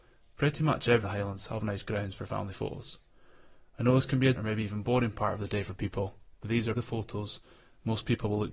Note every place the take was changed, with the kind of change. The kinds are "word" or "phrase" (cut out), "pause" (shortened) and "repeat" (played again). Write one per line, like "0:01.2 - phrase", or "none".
0:01.0 - phrase
0:04.4 - word
0:06.8 - word

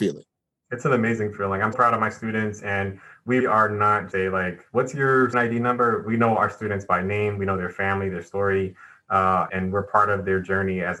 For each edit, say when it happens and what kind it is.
0:01.7 - word
0:03.4 - word
0:04.1 - word
0:05.3 - word
0:09.5 - word

